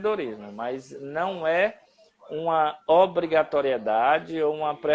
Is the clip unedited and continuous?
yes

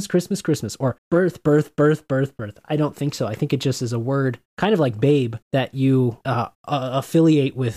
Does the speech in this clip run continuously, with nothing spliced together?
no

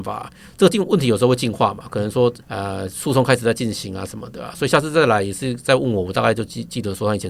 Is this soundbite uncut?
no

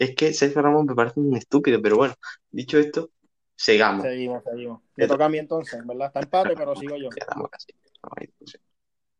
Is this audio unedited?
yes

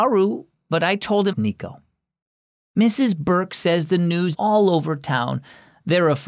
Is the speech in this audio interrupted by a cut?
yes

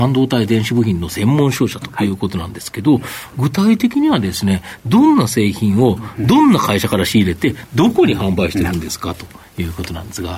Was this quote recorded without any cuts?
yes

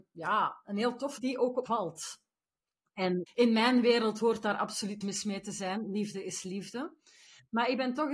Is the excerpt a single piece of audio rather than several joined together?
no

